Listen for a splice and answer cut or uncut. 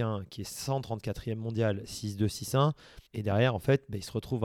cut